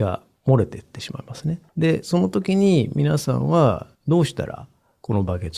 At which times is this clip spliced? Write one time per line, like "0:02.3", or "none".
0:01.7
0:03.9